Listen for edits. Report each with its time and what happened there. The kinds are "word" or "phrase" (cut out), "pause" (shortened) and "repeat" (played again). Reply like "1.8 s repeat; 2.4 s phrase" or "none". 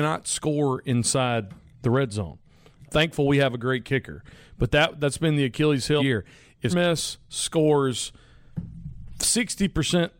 2.8 s word; 6.0 s word; 6.7 s word